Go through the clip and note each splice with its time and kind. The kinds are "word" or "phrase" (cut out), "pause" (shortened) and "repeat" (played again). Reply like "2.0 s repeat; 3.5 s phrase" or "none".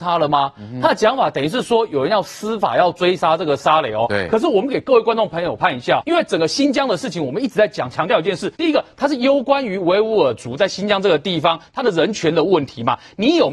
6.0 s word; 8.5 s pause